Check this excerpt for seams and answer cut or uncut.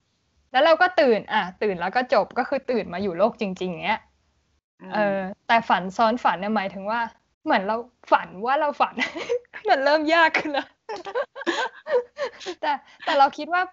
cut